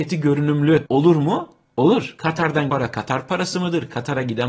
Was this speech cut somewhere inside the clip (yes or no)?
yes